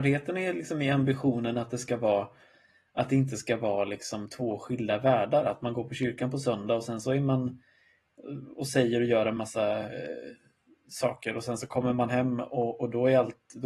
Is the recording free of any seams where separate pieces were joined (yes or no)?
yes